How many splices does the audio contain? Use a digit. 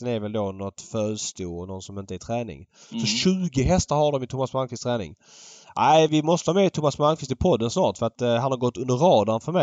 2